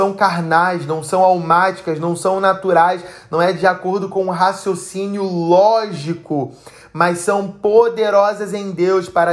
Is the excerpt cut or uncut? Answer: uncut